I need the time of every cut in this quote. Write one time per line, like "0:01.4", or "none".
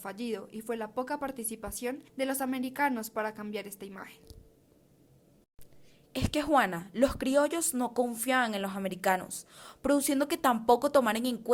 0:02.1